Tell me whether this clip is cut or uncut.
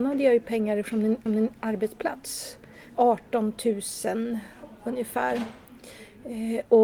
cut